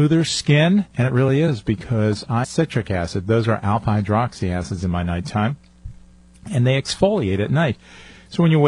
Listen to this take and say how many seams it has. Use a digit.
2